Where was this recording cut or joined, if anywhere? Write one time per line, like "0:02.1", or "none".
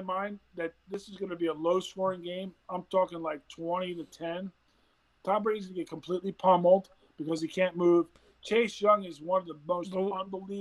none